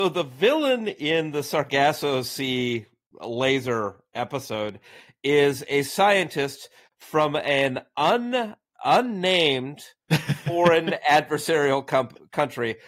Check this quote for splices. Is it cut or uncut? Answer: uncut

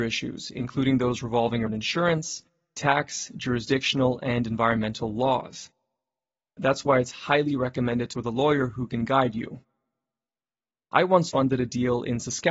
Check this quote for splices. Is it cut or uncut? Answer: cut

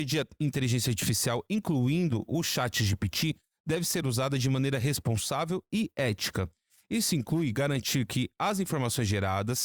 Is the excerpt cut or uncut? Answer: uncut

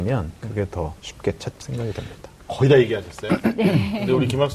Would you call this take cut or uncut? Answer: cut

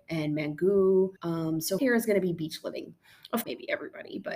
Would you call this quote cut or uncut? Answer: cut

